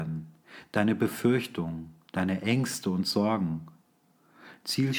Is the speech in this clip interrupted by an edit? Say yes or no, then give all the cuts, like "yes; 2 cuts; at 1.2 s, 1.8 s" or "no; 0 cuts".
no; 0 cuts